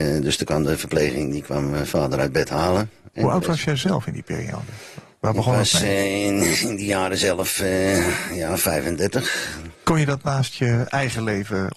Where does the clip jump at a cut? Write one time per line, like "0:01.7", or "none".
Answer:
0:09.7